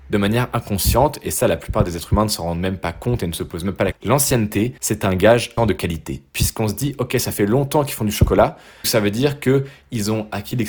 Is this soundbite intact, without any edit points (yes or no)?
no